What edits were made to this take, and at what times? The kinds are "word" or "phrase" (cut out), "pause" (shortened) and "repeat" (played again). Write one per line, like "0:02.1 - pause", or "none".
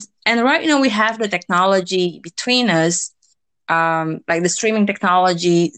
none